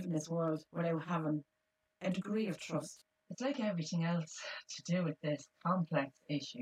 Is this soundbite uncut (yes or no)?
no